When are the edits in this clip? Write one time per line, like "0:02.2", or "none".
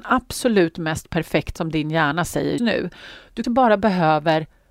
0:01.6
0:02.6
0:03.4